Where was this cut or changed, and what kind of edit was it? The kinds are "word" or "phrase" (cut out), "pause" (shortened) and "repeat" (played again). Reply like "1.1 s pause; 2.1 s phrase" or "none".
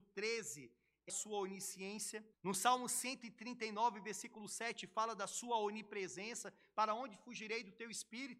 1.1 s phrase; 2.3 s pause